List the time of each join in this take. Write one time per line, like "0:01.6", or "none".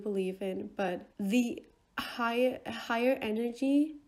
0:01.1